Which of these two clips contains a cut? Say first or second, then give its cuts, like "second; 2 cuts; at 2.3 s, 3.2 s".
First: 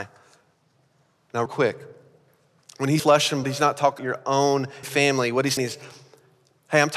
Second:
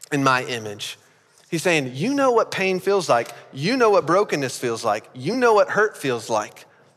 first; 6 cuts; at 1.5 s, 3.0 s, 3.4 s, 4.0 s, 4.8 s, 5.6 s